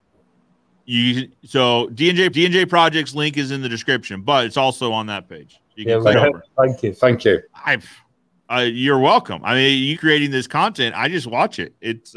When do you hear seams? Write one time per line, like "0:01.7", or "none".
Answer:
0:02.3
0:06.1
0:07.5
0:10.0